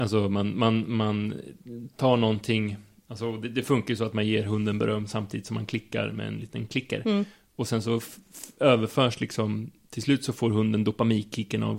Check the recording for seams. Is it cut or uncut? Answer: uncut